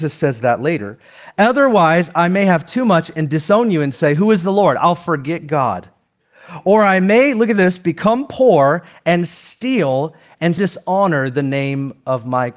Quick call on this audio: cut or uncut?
cut